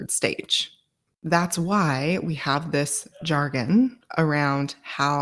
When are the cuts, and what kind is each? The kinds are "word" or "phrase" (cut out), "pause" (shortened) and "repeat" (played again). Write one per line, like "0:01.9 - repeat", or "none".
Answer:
none